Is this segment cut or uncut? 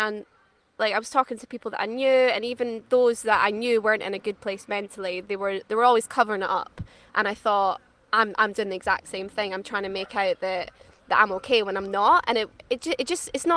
uncut